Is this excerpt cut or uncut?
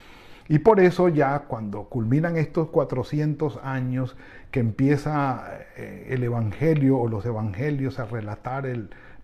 uncut